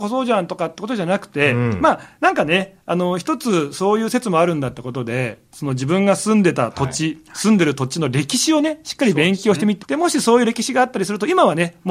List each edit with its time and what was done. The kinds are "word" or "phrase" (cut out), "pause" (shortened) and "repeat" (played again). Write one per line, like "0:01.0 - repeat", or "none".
0:09.8 - word